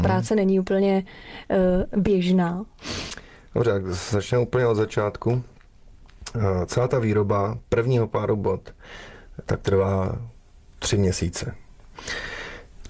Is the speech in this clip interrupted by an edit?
no; 0 cuts

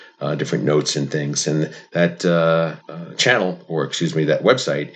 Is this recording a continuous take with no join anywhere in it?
no; 1 cut; at 2.8 s

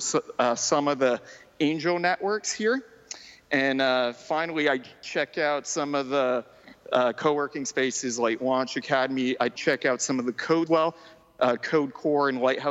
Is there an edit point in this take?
yes; 2 cuts; at 9.6 s, 10.7 s

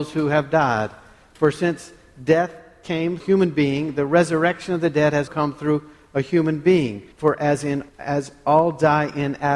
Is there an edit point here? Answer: yes; 4 cuts; at 3.2 s, 5.3 s, 7.1 s, 7.9 s

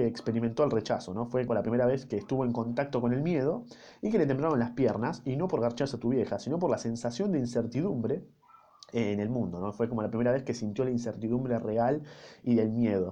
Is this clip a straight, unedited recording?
no; 1 cut; at 1.5 s

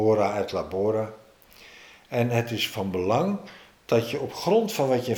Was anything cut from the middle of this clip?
no; 0 cuts

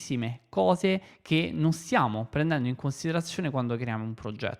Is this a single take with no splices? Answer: yes; 0 cuts

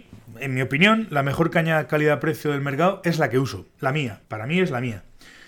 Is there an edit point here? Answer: yes; 1 cut; at 4.2 s

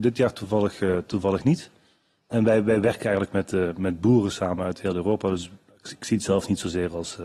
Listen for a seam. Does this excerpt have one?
no; 0 cuts

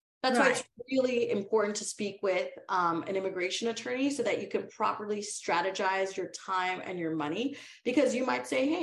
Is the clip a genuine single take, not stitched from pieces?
yes; 0 cuts

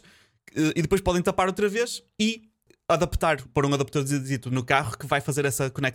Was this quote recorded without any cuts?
no; 1 cut; at 3.5 s

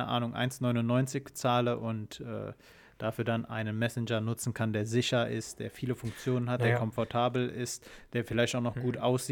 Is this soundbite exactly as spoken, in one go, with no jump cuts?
yes; 0 cuts

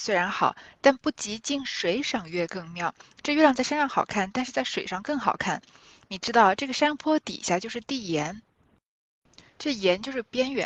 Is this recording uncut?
yes; 0 cuts

